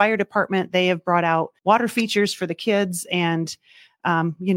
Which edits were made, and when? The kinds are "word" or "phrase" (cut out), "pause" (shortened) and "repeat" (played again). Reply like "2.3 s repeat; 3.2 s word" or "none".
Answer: 1.6 s pause